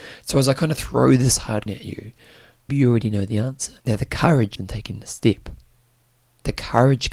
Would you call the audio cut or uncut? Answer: cut